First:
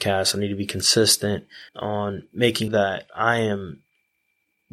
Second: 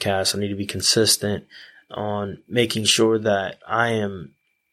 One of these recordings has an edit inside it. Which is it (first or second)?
first